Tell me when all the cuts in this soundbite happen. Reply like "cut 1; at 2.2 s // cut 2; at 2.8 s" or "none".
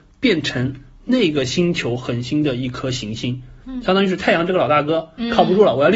none